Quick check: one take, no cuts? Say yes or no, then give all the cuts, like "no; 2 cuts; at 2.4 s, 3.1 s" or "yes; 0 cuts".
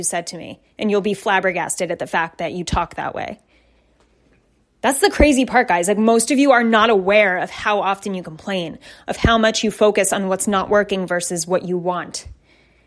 yes; 0 cuts